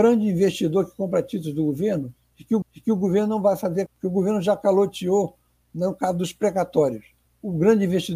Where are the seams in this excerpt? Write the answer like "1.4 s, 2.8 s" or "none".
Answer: 2.6 s, 3.9 s, 7.2 s